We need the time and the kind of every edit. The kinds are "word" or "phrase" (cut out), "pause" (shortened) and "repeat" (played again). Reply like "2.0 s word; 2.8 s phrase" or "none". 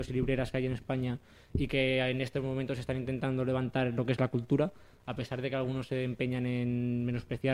none